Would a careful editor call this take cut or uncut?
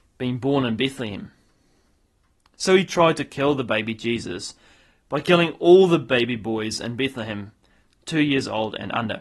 uncut